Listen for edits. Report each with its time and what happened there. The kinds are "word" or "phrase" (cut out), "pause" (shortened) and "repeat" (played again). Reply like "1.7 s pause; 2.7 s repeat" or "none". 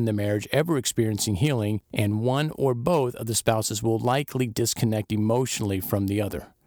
1.8 s pause